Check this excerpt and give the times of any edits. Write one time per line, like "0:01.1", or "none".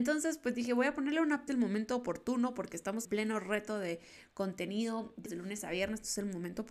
0:01.5
0:03.0
0:05.3